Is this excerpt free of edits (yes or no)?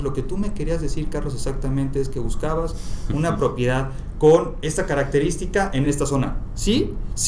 no